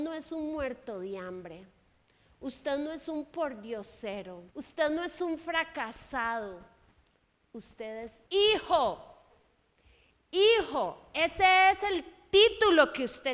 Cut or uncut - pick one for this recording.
cut